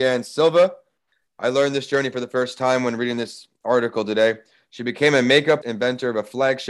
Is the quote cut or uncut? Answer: cut